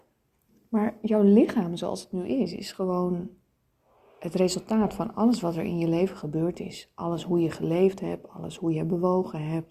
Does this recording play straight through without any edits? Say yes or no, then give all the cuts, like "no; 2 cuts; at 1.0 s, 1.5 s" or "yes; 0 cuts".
yes; 0 cuts